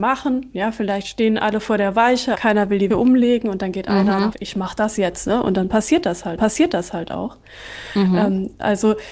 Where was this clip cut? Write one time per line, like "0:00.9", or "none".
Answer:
0:02.3
0:02.9
0:04.3
0:06.4